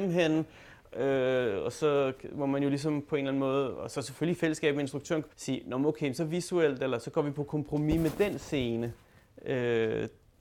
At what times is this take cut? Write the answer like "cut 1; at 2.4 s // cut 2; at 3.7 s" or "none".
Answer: cut 1; at 5.3 s